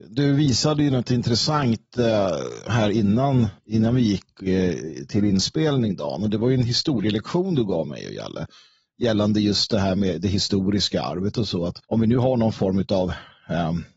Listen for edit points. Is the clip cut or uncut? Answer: cut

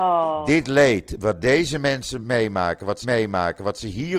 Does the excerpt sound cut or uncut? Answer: cut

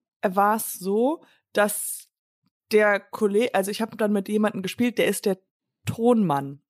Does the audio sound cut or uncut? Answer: uncut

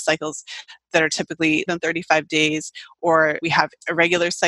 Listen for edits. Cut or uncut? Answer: cut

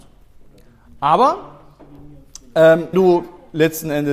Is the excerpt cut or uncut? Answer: cut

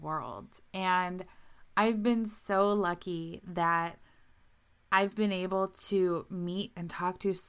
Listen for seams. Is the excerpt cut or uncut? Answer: uncut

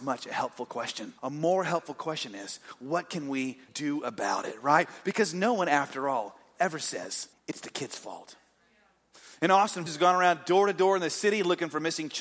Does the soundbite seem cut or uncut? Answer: cut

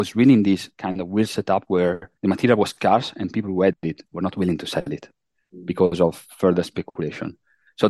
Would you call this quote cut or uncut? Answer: cut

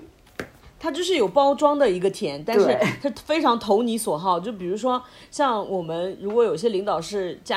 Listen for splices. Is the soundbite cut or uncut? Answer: uncut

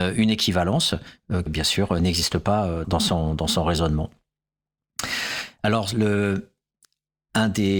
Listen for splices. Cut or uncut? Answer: cut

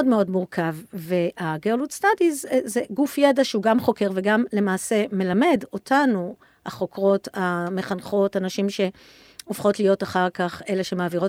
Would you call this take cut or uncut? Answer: uncut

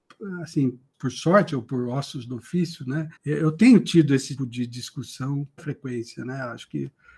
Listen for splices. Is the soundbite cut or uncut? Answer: cut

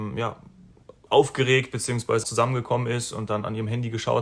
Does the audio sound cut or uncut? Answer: cut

